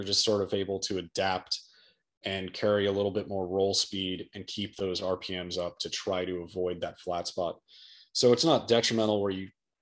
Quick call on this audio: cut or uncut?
uncut